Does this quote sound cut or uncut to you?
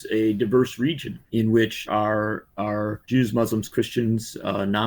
cut